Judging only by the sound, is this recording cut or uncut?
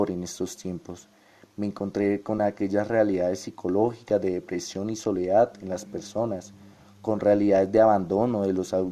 uncut